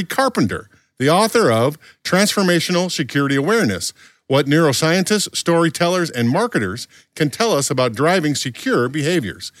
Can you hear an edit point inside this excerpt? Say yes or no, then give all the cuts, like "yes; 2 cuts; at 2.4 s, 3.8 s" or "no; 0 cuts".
no; 0 cuts